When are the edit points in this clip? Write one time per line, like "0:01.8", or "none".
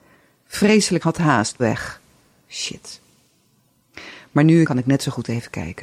0:01.0
0:01.6
0:04.6